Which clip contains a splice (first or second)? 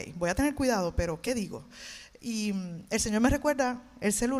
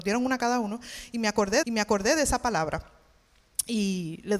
second